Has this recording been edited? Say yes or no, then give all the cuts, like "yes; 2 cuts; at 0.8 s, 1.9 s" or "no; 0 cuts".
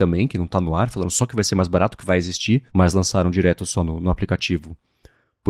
yes; 1 cut; at 2.7 s